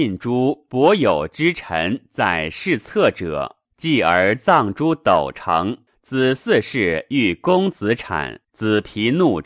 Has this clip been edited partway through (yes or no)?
yes